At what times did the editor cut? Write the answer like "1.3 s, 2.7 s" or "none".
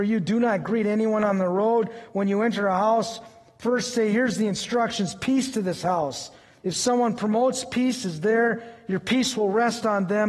none

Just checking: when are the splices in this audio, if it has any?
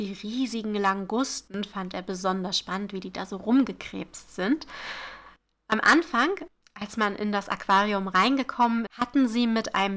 8.9 s

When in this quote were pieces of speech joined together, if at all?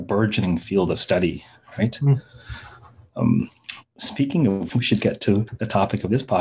none

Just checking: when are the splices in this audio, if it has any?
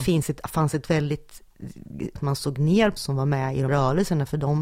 2.2 s, 3.0 s, 3.7 s

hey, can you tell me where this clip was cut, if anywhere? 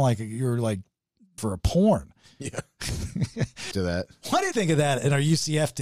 1.4 s, 3.7 s, 4.5 s

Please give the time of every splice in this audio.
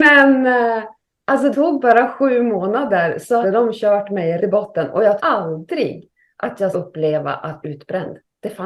1.5 s, 3.4 s, 4.4 s, 5.2 s, 6.7 s, 7.6 s

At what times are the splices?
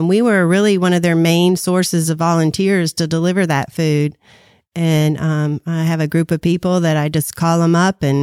none

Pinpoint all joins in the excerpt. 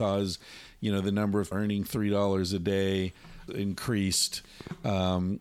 1.5 s, 3.5 s

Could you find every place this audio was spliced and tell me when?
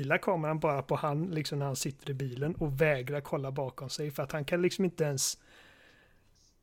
none

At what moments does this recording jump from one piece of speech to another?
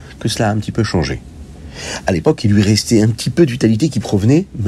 none

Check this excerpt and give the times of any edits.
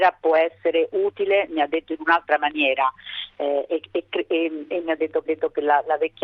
4.8 s, 5.2 s

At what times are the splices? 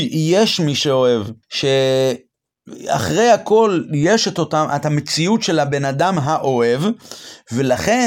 1.4 s

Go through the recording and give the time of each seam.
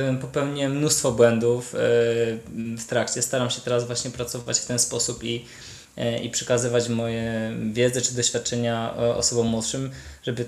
none

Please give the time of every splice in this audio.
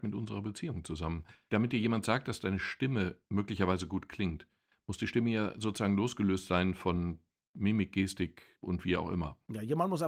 none

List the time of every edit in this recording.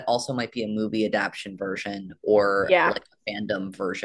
none

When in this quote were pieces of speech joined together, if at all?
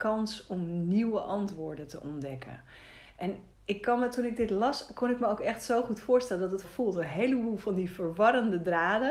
6.6 s

